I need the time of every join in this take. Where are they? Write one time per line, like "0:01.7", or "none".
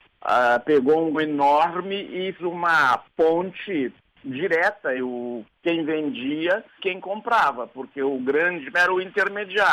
0:01.1
0:02.4
0:05.0
0:06.8
0:08.7